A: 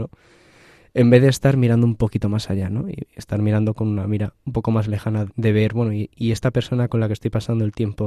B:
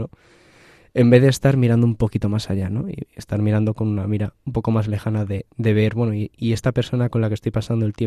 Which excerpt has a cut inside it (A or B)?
A